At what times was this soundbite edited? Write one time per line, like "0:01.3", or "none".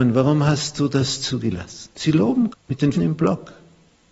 0:01.9
0:02.5
0:02.9